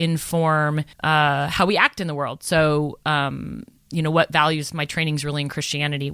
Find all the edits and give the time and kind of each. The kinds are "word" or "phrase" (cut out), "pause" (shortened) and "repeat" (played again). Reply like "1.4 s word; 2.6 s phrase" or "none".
0.9 s pause